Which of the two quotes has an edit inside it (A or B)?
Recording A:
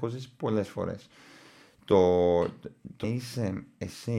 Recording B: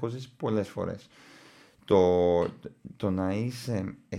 A